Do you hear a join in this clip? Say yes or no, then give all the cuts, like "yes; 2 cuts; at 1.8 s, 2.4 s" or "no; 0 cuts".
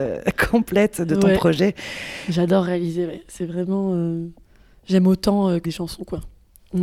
yes; 1 cut; at 5.6 s